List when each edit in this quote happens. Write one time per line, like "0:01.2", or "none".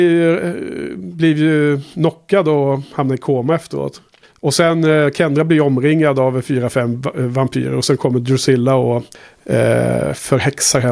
0:04.2
0:09.1